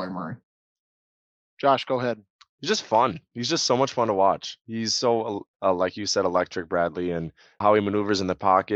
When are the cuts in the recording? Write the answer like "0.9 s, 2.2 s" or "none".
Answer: 5.5 s, 7.6 s